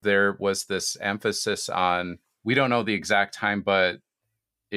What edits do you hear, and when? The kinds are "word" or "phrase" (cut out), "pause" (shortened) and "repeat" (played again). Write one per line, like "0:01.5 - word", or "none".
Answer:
none